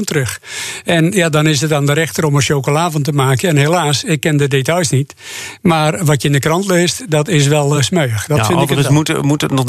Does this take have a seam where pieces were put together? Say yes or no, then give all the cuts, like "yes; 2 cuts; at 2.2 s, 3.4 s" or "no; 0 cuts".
no; 0 cuts